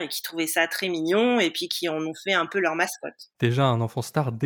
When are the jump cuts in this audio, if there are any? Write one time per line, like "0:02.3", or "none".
0:03.3